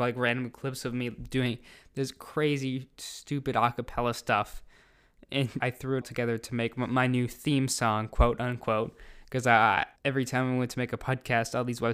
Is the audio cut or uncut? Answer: cut